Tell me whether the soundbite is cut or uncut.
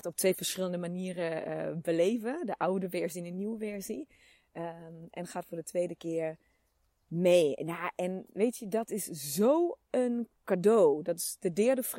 uncut